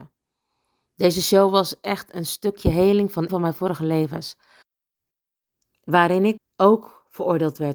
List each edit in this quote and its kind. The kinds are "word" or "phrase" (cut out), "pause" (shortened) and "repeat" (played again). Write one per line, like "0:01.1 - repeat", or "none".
0:03.3 - word
0:06.4 - phrase